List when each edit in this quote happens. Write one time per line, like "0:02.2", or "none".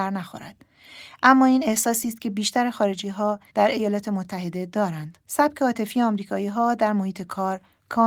0:03.5
0:05.2